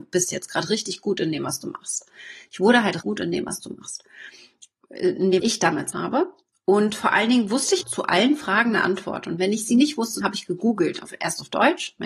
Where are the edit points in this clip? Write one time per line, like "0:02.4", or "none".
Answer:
0:03.0
0:05.4
0:05.9
0:07.8
0:10.2